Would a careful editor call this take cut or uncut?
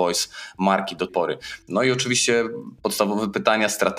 cut